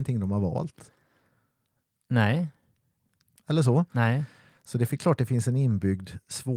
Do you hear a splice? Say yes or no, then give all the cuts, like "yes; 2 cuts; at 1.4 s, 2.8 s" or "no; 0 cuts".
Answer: no; 0 cuts